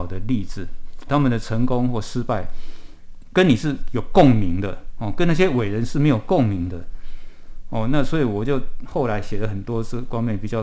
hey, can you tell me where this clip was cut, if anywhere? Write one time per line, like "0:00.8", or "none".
0:01.1